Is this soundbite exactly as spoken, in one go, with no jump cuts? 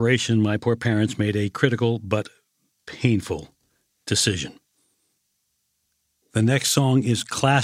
yes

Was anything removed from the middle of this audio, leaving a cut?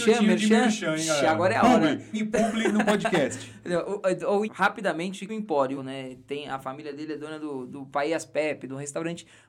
yes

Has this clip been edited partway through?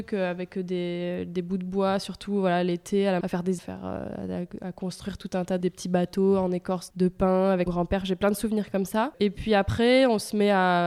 yes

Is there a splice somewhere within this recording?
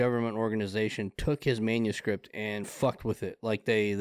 yes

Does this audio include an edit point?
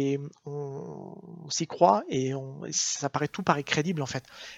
no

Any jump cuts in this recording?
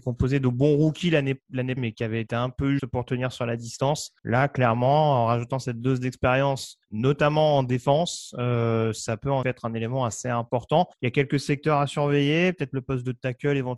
yes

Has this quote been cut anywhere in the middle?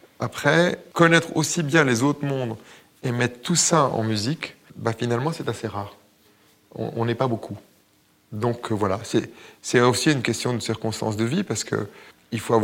no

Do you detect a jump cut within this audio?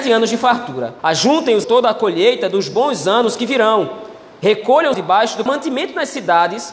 yes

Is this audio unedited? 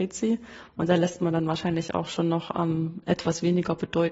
yes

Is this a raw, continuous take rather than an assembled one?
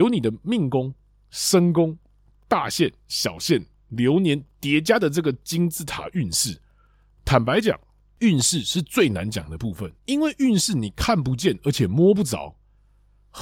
no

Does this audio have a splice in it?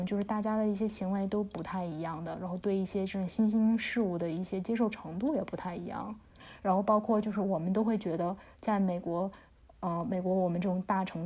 no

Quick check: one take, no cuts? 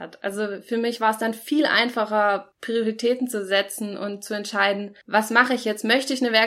no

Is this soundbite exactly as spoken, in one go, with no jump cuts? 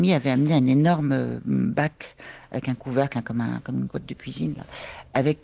no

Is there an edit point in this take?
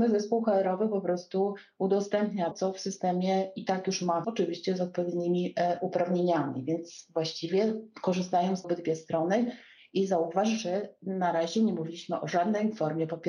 yes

